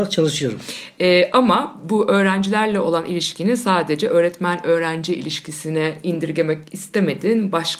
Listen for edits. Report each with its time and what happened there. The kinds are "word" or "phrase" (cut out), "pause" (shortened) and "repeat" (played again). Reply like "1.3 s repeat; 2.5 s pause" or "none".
none